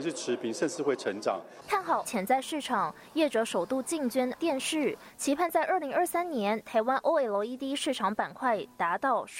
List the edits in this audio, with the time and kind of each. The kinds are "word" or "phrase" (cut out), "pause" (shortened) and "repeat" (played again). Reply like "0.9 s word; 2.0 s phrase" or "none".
2.0 s word; 4.4 s word